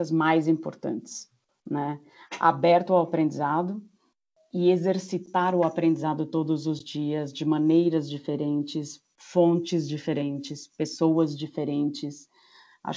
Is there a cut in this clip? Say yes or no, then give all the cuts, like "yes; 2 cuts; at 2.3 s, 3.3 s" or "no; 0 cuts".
no; 0 cuts